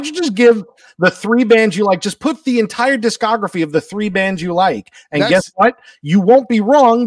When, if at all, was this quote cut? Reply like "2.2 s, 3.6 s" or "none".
none